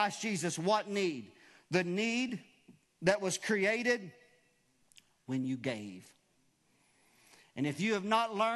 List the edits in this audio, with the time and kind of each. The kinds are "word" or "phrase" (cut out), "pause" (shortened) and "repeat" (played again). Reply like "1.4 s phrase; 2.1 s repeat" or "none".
none